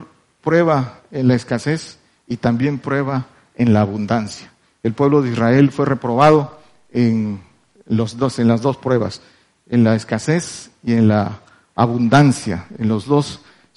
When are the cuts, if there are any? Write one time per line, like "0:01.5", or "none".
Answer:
none